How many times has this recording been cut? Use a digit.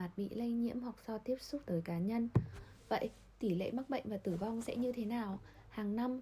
1